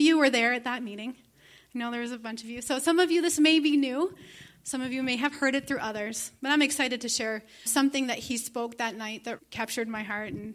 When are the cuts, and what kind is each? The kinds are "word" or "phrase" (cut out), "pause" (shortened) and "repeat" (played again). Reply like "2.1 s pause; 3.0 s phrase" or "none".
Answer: 7.7 s word; 9.4 s word